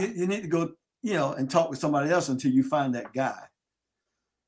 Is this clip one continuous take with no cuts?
yes; 0 cuts

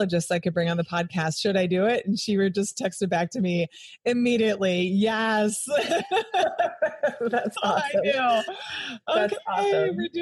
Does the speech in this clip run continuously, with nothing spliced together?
yes; 0 cuts

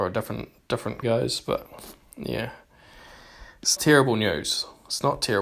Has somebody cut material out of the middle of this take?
yes; 2 cuts; at 1.0 s, 3.8 s

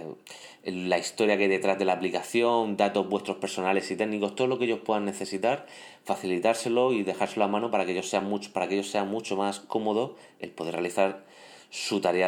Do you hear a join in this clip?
no; 0 cuts

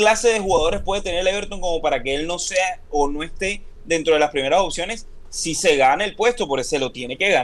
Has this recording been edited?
no; 0 cuts

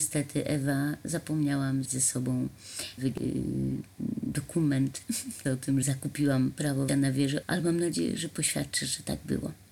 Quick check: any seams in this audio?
yes; 6 cuts; at 1.9 s, 3.0 s, 5.5 s, 5.8 s, 6.9 s, 7.4 s

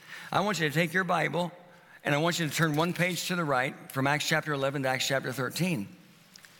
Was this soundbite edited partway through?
no; 0 cuts

